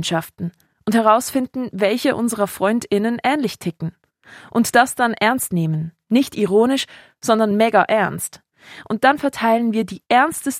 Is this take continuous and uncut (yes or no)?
yes